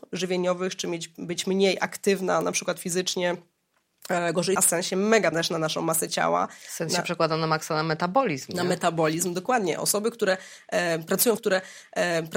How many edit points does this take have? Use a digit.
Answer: 3